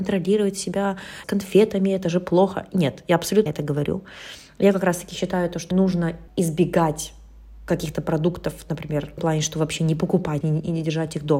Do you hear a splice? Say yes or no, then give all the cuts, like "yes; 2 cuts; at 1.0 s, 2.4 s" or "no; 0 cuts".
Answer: yes; 6 cuts; at 1.2 s, 3.5 s, 5.7 s, 6.3 s, 9.2 s, 10.4 s